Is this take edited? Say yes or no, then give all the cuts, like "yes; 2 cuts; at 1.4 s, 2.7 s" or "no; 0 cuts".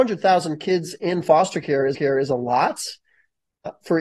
yes; 1 cut; at 1.9 s